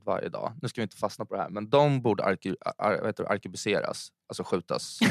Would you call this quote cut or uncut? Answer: uncut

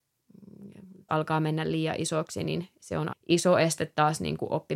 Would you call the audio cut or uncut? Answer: cut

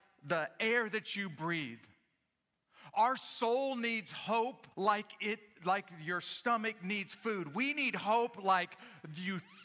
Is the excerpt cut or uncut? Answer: cut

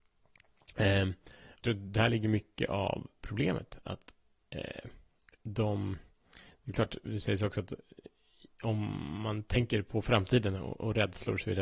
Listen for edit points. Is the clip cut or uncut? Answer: cut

